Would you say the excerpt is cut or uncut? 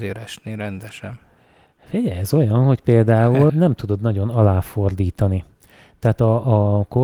cut